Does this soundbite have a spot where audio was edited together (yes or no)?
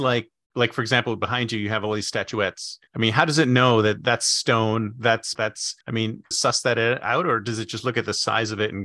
yes